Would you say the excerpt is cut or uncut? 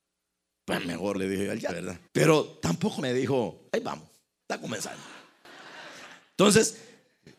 cut